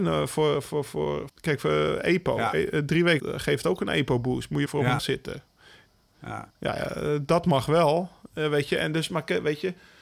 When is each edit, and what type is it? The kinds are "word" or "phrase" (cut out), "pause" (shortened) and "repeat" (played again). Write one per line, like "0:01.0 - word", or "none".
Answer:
0:01.3 - word
0:03.2 - word
0:04.7 - phrase
0:05.0 - word
0:06.5 - pause